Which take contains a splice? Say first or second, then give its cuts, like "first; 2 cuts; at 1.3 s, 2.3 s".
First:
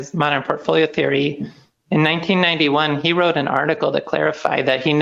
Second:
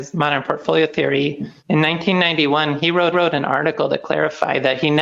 second; 2 cuts; at 1.6 s, 3.1 s